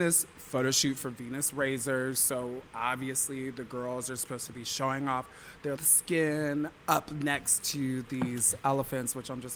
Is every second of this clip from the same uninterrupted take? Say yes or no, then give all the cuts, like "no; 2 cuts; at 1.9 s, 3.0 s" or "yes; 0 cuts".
no; 1 cut; at 5.8 s